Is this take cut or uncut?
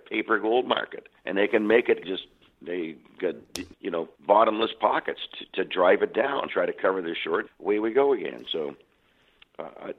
cut